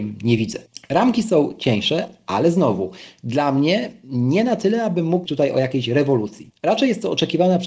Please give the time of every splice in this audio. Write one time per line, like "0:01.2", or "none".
0:05.3